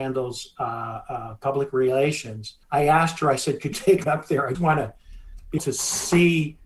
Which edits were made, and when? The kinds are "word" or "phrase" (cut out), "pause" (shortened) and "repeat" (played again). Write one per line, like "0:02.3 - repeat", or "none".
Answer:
0:02.6 - pause
0:03.7 - word
0:04.0 - word
0:04.5 - word
0:05.6 - word

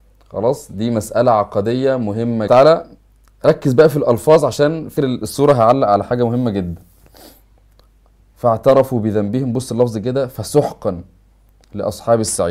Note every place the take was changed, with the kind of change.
0:02.5 - phrase
0:05.0 - word

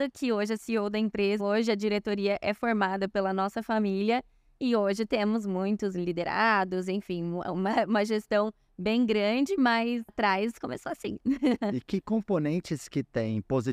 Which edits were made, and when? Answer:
0:01.4 - word
0:10.1 - word

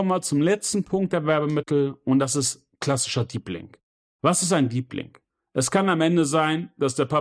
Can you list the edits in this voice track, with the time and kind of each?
none

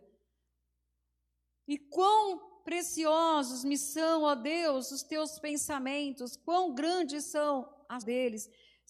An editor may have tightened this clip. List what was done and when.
0:08.0 - word

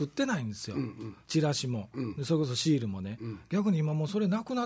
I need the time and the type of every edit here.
0:01.2 - pause

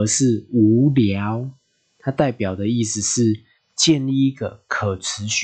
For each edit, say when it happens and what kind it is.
none

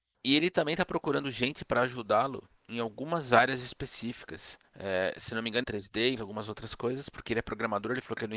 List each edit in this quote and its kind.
0:02.6 - pause
0:04.6 - pause
0:05.6 - phrase
0:06.2 - word

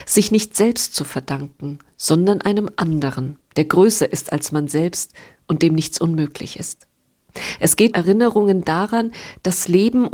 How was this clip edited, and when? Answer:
0:07.9 - word

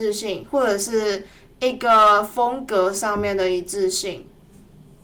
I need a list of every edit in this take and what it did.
none

